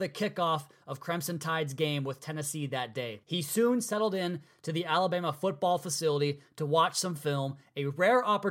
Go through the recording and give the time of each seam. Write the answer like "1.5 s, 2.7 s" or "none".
3.2 s